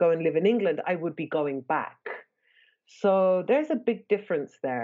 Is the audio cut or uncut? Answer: uncut